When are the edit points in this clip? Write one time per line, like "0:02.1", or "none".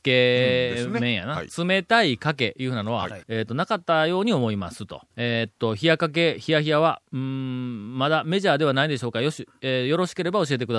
0:03.2
0:05.1